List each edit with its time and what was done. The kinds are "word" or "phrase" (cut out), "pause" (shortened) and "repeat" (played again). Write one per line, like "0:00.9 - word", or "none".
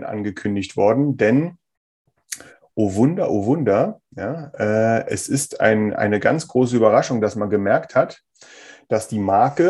none